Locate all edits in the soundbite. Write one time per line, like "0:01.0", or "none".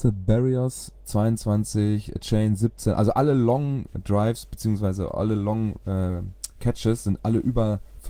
none